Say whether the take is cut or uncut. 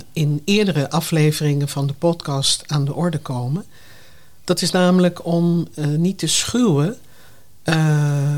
uncut